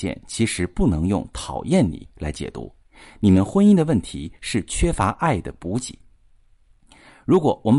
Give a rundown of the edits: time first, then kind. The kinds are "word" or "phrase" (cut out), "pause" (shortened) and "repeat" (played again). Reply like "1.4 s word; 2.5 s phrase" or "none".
none